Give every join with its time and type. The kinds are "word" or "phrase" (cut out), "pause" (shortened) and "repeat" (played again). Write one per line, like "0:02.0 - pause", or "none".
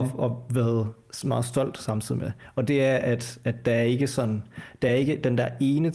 none